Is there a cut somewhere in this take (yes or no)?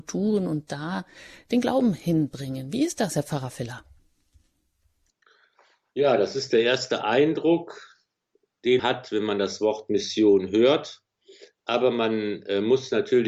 yes